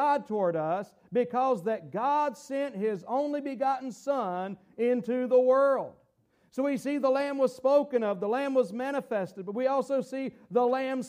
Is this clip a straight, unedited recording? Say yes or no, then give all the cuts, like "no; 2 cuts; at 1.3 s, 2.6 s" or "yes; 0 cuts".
yes; 0 cuts